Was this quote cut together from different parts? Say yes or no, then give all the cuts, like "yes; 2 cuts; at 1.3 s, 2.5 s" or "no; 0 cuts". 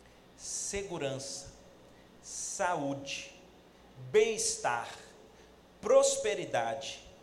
no; 0 cuts